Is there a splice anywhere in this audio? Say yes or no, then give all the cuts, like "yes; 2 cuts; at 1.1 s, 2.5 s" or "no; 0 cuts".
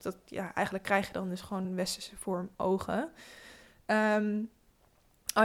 no; 0 cuts